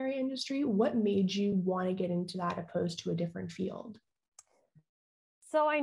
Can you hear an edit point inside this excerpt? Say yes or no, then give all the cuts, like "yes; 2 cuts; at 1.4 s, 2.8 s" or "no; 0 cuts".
no; 0 cuts